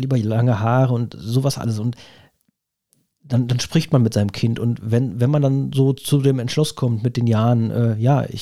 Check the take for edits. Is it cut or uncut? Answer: uncut